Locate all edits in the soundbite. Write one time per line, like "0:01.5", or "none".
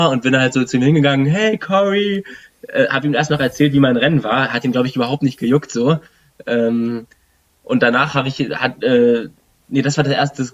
none

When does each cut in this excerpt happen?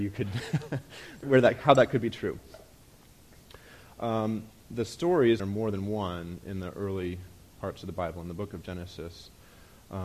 0:01.2
0:05.4
0:07.5

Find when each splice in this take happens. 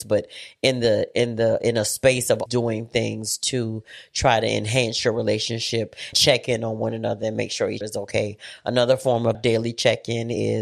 0:02.5
0:06.1
0:07.8
0:09.3

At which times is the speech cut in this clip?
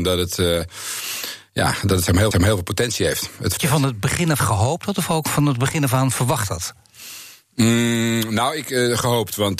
0:02.3
0:03.6
0:04.4

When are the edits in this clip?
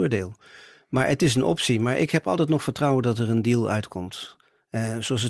none

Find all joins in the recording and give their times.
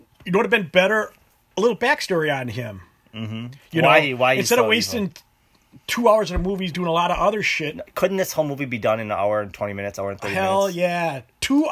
none

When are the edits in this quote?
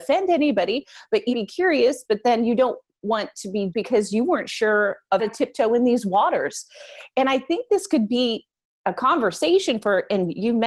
0:01.3
0:03.7
0:05.2
0:08.7

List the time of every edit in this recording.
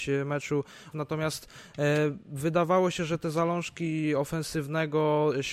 0:00.9

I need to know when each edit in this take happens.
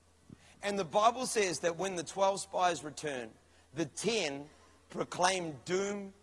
none

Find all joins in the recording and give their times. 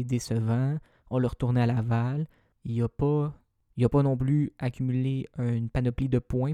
none

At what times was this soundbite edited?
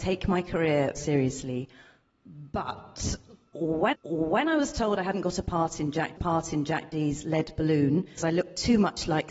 0:01.0
0:03.9
0:06.2
0:08.2

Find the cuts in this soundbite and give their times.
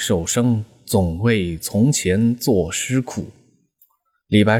none

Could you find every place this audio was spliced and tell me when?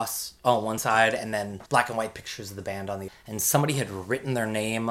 0:01.7
0:03.1

